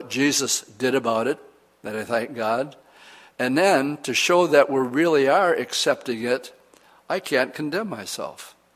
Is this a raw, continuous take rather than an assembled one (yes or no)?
yes